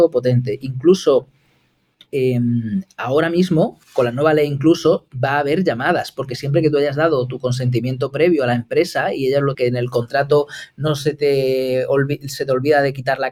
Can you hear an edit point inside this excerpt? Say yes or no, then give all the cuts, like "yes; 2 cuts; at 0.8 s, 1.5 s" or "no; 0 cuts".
yes; 2 cuts; at 3.8 s, 9.5 s